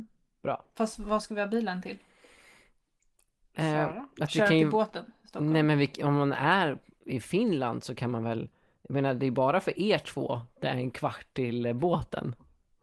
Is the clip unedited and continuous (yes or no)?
yes